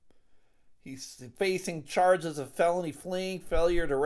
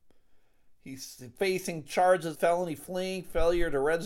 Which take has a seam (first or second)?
second